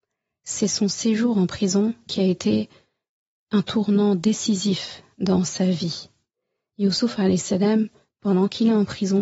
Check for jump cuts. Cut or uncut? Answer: uncut